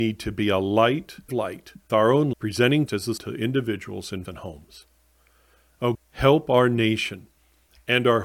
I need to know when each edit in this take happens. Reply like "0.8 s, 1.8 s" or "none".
1.3 s, 1.9 s, 2.3 s, 2.9 s, 3.2 s, 4.3 s, 5.9 s